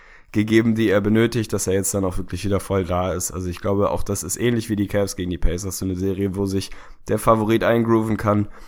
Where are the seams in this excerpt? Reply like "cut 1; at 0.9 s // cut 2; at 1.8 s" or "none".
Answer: none